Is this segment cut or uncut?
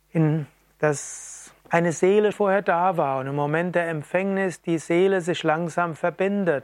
cut